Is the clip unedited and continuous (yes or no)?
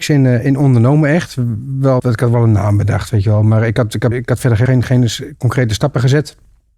no